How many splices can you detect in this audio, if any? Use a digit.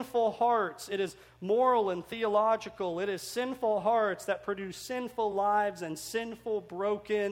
0